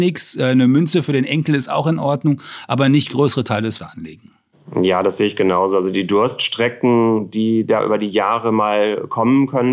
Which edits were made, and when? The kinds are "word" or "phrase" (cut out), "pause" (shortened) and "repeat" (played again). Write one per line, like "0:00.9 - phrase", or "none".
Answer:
0:03.8 - word